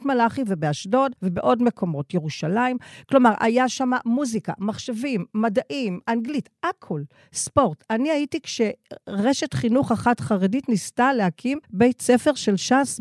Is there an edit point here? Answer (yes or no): yes